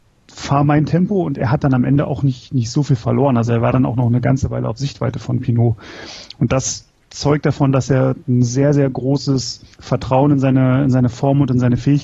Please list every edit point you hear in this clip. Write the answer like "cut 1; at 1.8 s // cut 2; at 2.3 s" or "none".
cut 1; at 9.7 s